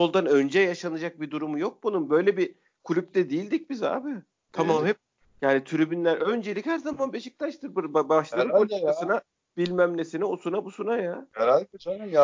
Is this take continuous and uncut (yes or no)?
yes